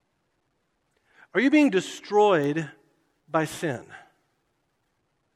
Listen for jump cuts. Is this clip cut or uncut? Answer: uncut